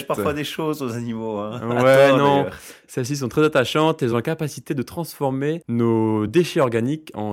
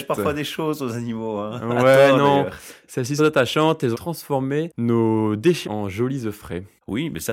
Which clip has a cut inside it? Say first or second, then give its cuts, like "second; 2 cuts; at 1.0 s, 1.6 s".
second; 3 cuts; at 3.2 s, 3.9 s, 5.6 s